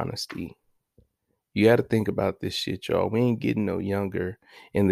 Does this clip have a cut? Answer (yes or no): no